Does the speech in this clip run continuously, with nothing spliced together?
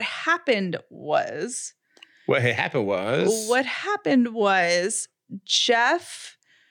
yes; 0 cuts

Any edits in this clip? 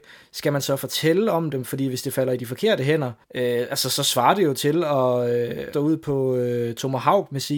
yes; 2 cuts; at 3.2 s, 5.7 s

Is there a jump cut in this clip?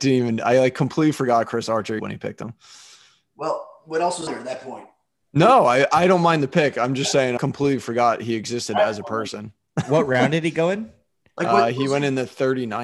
yes; 3 cuts; at 2.0 s, 4.3 s, 7.4 s

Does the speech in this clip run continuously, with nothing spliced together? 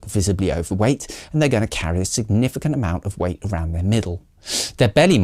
yes; 0 cuts

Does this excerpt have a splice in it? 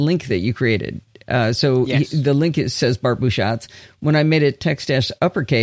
no; 0 cuts

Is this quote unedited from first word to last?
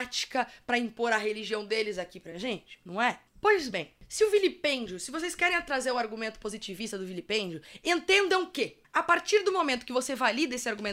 yes; 0 cuts

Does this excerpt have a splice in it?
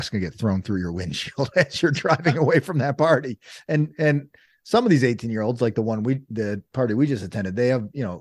no; 0 cuts

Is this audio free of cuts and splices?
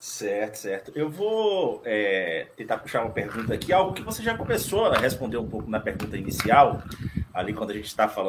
yes; 0 cuts

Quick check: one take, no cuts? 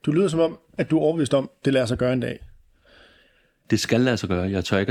yes; 0 cuts

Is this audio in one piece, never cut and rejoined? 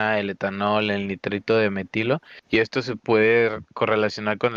no; 1 cut; at 2.4 s

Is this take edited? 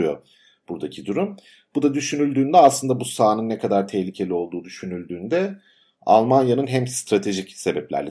no; 0 cuts

